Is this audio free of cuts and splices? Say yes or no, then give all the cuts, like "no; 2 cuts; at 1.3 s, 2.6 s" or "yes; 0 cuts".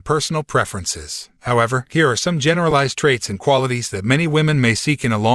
yes; 0 cuts